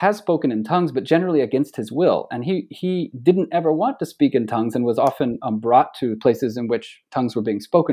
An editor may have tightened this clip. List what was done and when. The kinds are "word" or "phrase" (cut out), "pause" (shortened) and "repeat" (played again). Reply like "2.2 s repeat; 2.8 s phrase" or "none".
none